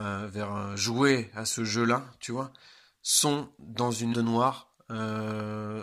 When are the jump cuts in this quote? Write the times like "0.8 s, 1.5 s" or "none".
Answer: 4.1 s